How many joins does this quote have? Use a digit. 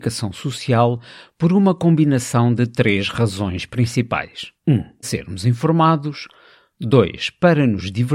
2